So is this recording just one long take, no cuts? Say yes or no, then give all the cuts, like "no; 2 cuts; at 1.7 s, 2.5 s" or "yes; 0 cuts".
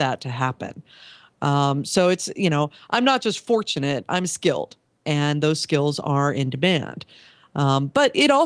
yes; 0 cuts